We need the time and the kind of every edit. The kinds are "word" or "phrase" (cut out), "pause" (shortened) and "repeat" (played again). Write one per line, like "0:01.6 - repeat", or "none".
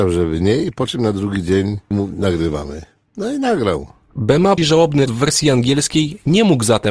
0:01.9 - word
0:04.6 - word
0:05.1 - word

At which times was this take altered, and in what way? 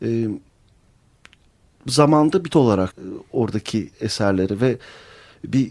0:02.5 - word
0:02.9 - word
0:03.9 - word

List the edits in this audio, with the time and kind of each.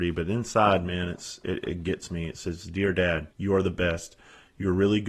0:03.3 - pause

